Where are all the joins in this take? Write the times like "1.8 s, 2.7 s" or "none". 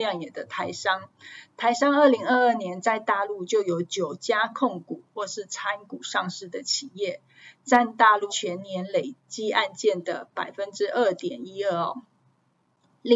8.3 s, 9.2 s

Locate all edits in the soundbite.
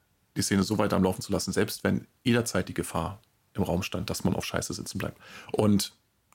none

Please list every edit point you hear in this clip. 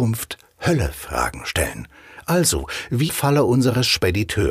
3.1 s

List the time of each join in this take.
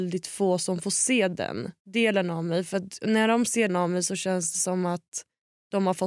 1.8 s, 3.7 s

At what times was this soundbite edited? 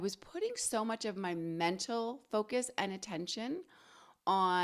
none

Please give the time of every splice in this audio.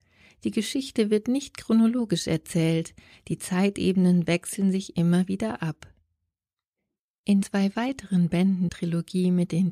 7.4 s, 8.7 s

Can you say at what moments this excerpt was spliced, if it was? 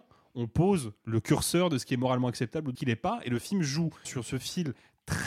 2.7 s, 4.0 s

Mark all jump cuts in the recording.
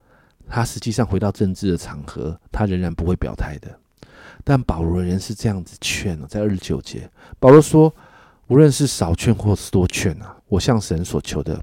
2.5 s, 10.4 s

